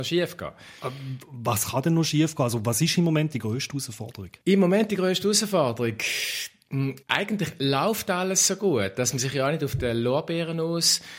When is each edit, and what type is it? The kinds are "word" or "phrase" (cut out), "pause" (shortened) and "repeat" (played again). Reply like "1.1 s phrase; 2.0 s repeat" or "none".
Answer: 4.4 s pause; 7.0 s pause